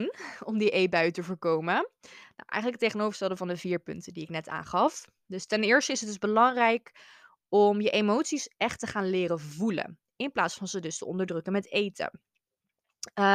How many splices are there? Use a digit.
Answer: 0